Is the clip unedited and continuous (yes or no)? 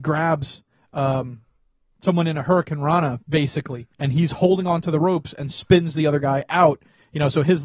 no